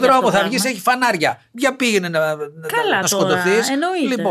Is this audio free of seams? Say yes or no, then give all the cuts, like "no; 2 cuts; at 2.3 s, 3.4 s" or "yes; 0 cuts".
no; 1 cut; at 3.0 s